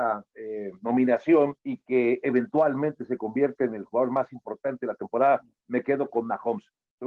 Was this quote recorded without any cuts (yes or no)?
no